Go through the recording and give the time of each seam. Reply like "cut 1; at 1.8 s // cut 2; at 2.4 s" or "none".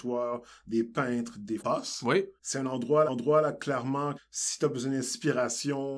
cut 1; at 1.6 s // cut 2; at 2.4 s // cut 3; at 3.1 s // cut 4; at 4.2 s